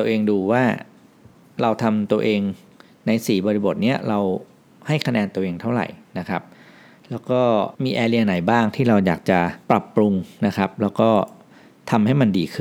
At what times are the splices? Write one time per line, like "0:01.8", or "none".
0:07.7
0:09.6

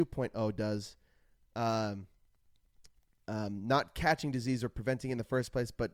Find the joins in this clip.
none

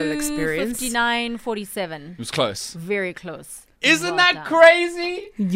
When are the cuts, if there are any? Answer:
0:03.7

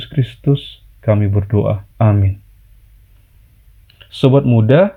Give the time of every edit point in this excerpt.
0:01.9

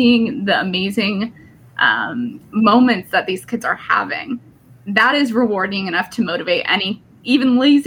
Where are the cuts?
none

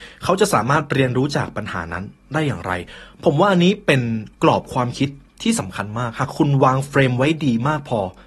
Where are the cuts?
0:04.3

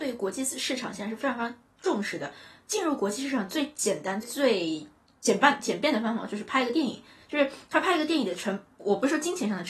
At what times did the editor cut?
0:04.2

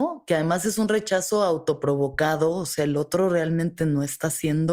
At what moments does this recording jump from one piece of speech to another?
none

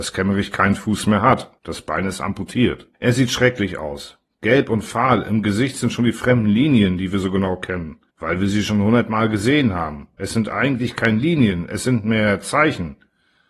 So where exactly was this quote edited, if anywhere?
0:01.6
0:02.9
0:08.1
0:10.1

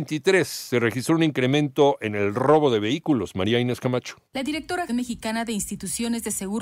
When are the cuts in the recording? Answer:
0:04.3
0:04.9

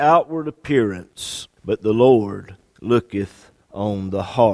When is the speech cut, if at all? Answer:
0:01.6
0:03.6

